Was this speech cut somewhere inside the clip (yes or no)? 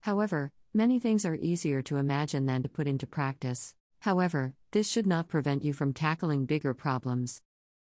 yes